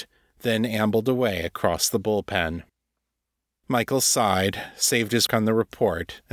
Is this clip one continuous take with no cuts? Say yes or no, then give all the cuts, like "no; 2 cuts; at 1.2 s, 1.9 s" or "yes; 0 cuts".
no; 1 cut; at 5.3 s